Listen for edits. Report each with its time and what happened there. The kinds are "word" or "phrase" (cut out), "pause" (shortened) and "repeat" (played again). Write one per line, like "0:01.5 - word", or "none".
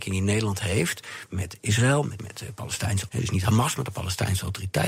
0:02.2 - word
0:03.1 - word